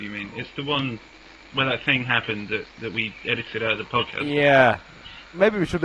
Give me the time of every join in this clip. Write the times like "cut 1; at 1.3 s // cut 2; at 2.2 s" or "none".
none